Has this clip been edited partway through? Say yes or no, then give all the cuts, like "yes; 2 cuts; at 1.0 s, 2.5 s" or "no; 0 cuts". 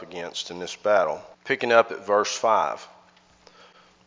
yes; 1 cut; at 1.3 s